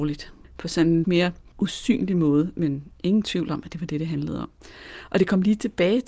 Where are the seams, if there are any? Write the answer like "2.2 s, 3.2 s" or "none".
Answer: 1.0 s